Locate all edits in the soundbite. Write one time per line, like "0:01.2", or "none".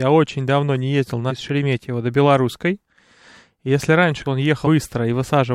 0:01.3
0:04.2
0:04.6

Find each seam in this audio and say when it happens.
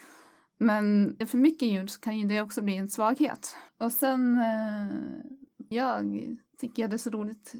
0:01.2
0:03.7
0:05.7
0:06.5

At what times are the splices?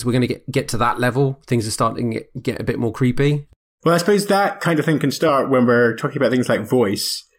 none

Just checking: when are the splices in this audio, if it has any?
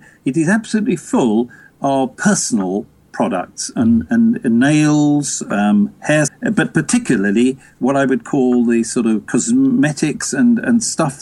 0:06.3

